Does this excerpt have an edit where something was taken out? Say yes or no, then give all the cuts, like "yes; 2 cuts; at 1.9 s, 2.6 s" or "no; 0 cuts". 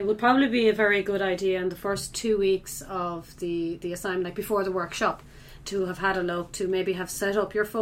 no; 0 cuts